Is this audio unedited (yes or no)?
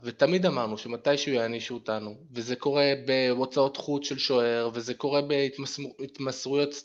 yes